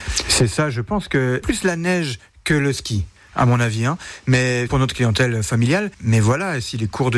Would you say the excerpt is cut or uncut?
cut